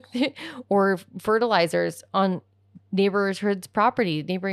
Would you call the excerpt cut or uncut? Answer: uncut